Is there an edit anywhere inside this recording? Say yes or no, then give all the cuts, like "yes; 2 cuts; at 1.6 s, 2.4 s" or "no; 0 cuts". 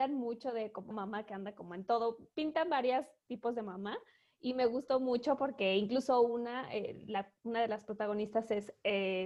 yes; 1 cut; at 0.9 s